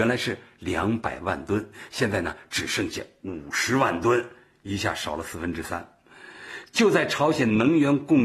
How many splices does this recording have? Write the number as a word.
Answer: zero